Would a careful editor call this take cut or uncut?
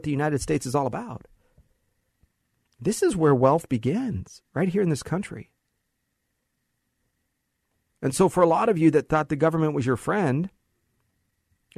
uncut